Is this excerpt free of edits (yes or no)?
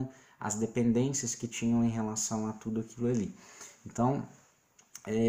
yes